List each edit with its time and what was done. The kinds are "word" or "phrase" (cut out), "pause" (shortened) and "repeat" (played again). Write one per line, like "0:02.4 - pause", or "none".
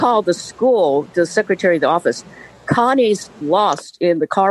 0:01.1 - word
0:03.4 - word

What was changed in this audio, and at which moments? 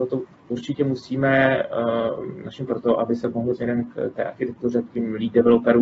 0:02.7 - phrase
0:03.5 - word

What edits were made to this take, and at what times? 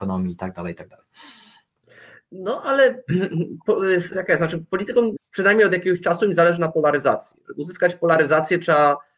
0:04.1 - phrase
0:05.2 - phrase

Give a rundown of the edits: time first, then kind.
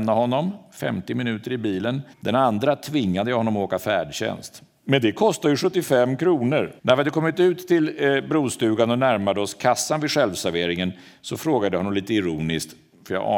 0:02.1 - pause
0:06.8 - pause

